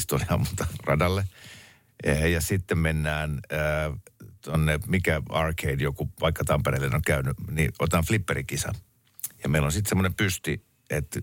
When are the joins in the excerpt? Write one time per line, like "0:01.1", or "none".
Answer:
none